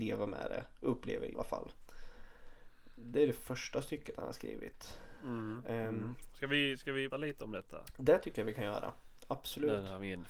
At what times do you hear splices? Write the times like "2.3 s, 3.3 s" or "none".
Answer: 1.3 s, 7.1 s